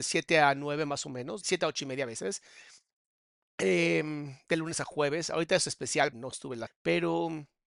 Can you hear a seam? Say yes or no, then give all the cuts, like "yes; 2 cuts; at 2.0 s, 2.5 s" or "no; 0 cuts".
yes; 3 cuts; at 1.4 s, 6.1 s, 6.7 s